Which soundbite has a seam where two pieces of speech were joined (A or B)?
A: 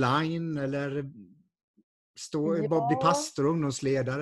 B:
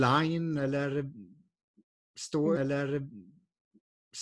B